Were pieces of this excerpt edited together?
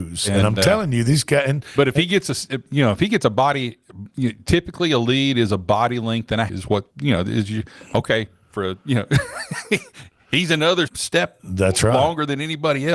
yes; 3 cuts; at 6.5 s, 6.9 s, 10.9 s

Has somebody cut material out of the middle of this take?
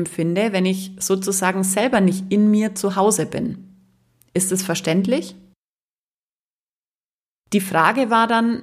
no; 0 cuts

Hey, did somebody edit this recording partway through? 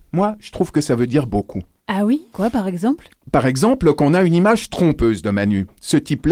yes; 1 cut; at 2.3 s

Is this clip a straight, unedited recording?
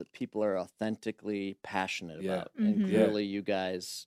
yes; 0 cuts

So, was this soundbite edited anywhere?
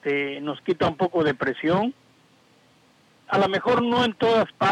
no; 0 cuts

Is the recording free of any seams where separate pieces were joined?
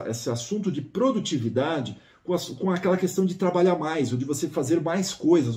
yes; 0 cuts

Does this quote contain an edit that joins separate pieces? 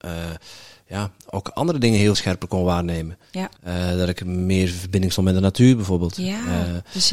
yes; 2 cuts; at 2.1 s, 3.6 s

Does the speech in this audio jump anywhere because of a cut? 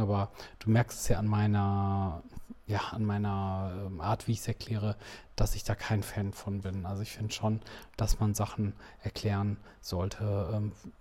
no; 0 cuts

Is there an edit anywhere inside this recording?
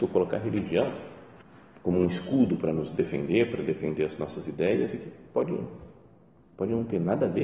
yes; 1 cut; at 1.4 s

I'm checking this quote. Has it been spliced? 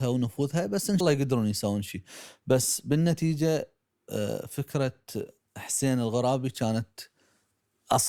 yes; 1 cut; at 1.0 s

